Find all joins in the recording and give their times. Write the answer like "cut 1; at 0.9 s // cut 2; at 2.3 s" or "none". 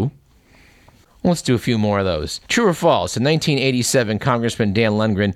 cut 1; at 2.5 s